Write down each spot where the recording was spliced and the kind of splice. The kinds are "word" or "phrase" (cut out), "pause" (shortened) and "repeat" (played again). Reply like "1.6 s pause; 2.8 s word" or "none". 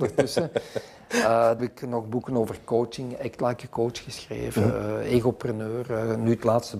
1.6 s phrase